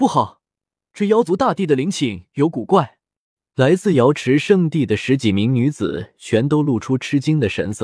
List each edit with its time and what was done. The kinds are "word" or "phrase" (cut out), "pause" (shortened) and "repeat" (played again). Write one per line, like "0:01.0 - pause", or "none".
0:03.2 - pause